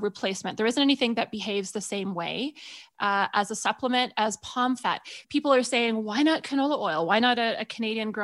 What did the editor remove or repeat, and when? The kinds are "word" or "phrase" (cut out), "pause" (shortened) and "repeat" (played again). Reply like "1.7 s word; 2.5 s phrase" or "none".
5.2 s pause